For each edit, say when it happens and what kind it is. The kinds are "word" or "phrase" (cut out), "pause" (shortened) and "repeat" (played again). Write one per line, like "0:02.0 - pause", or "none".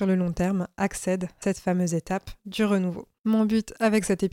0:01.4 - word
0:03.2 - pause